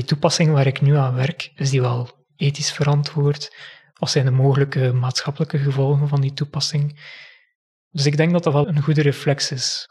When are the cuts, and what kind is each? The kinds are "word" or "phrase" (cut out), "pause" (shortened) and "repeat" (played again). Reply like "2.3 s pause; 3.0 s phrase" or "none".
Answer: 8.6 s word